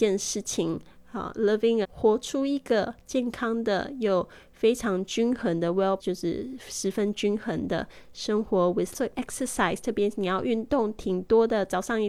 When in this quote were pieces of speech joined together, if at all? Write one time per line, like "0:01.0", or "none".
0:01.8
0:06.0
0:08.9

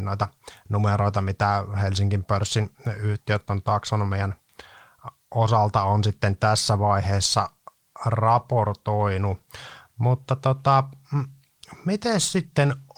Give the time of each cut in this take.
none

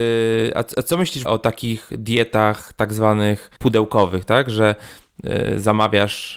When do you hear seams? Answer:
0:01.2
0:03.6

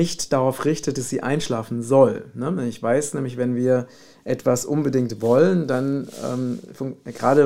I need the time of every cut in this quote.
none

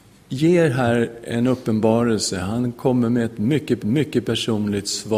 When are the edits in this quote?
0:03.8

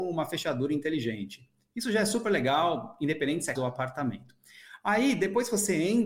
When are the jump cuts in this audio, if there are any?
0:03.5

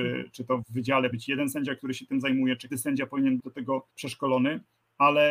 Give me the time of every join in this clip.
0:01.1
0:02.7
0:03.4
0:03.9

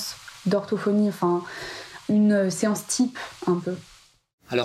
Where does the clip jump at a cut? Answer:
none

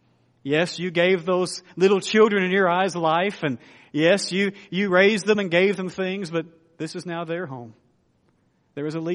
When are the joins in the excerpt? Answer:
none

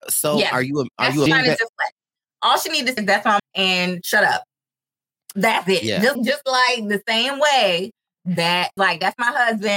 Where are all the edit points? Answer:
0:01.3
0:03.0
0:03.4
0:06.2
0:08.8

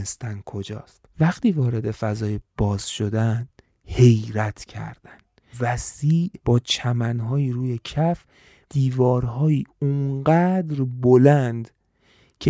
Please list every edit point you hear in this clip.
0:01.1
0:03.7
0:05.5
0:06.4
0:08.7

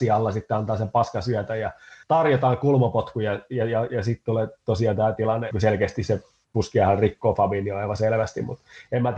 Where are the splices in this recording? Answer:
0:02.0
0:05.5

